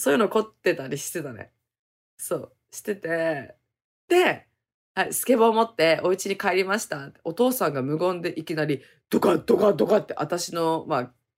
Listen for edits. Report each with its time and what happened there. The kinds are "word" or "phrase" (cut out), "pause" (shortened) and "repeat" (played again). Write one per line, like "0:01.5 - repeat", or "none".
none